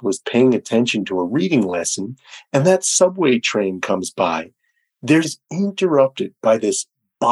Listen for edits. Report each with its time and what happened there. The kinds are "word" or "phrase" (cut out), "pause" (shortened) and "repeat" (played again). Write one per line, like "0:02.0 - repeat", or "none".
0:05.2 - word